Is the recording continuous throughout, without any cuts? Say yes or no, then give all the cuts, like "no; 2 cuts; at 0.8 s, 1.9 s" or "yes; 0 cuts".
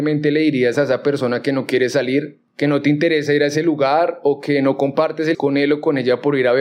no; 1 cut; at 5.3 s